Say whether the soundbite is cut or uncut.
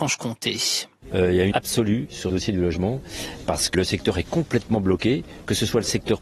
cut